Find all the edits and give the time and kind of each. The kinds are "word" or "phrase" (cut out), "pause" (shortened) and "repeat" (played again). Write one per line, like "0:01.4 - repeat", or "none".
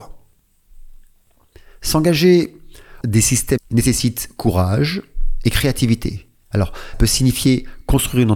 0:03.0 - word
0:03.6 - word
0:06.9 - word